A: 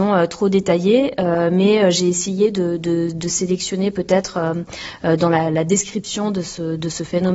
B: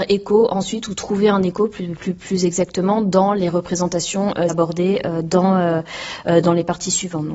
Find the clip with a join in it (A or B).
B